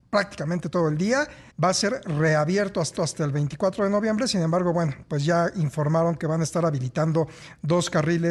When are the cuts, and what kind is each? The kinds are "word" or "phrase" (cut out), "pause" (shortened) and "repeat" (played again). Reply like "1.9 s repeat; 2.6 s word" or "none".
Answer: 1.5 s pause; 3.0 s repeat